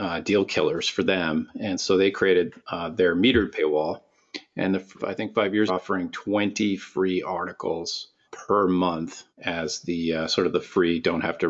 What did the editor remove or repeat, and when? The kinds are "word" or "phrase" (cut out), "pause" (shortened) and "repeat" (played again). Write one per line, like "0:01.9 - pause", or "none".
0:02.6 - pause
0:05.0 - phrase
0:05.7 - phrase
0:08.2 - word
0:09.3 - pause